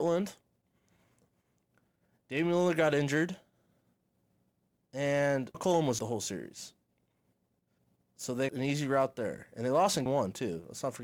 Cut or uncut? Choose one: cut